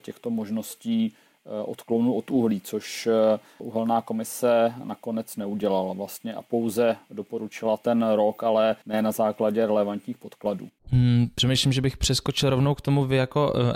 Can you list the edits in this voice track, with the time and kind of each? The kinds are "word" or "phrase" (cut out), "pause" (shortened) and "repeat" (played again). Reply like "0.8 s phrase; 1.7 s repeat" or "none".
8.8 s pause; 10.8 s pause